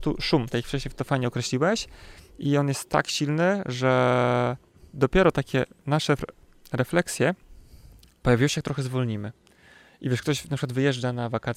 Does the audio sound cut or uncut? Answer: uncut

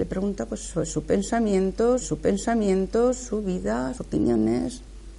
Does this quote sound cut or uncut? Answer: cut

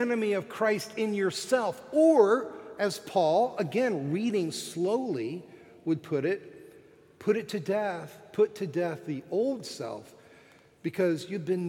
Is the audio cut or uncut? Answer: uncut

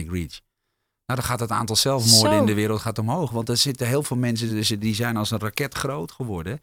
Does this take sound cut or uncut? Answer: uncut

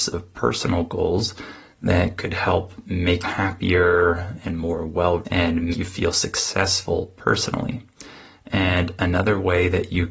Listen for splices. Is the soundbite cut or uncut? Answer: cut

